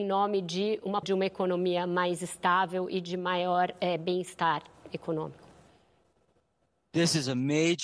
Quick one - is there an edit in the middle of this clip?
yes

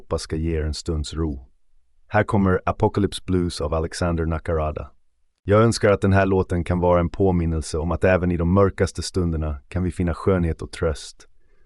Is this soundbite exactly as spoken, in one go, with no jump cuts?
yes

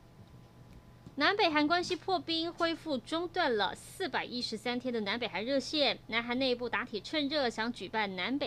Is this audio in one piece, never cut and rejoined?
no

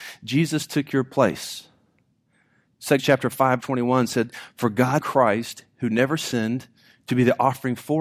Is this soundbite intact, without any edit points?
no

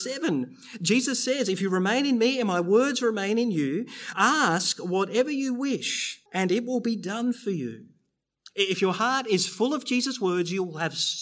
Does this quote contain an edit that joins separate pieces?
yes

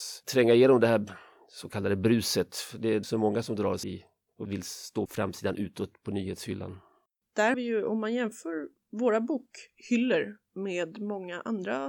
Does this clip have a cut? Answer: yes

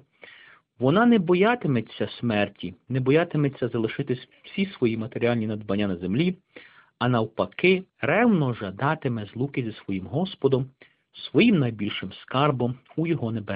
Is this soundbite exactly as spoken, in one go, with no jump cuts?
no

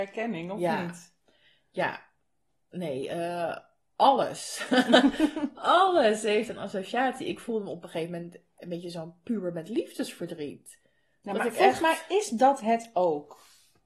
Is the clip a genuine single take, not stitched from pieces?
yes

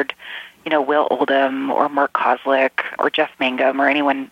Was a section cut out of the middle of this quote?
yes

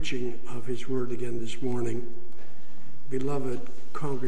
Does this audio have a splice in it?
no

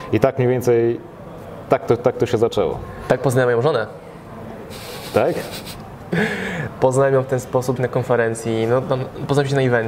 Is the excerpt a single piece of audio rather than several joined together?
no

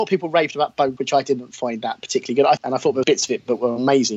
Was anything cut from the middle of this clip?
yes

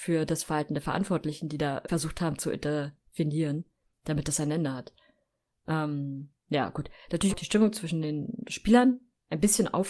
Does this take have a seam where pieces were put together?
yes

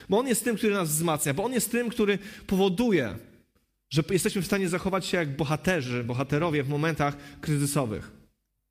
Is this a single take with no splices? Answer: yes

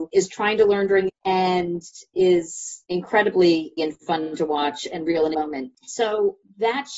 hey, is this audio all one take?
no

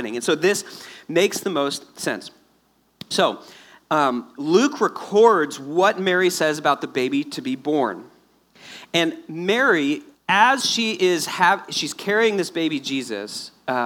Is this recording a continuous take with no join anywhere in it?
no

